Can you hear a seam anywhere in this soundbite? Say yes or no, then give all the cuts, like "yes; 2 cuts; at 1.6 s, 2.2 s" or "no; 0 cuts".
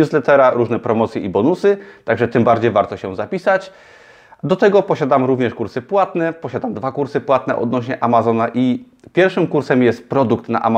no; 0 cuts